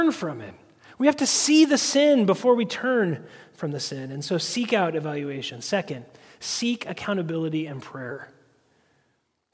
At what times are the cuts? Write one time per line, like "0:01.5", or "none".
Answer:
none